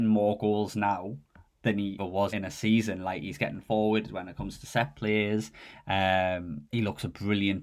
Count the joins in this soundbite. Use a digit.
4